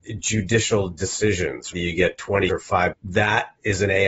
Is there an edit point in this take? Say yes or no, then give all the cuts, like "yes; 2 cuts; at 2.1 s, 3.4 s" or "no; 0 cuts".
yes; 3 cuts; at 1.7 s, 2.5 s, 2.9 s